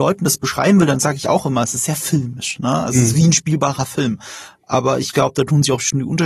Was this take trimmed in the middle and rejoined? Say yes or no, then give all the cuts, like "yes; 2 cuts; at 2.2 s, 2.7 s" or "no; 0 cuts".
no; 0 cuts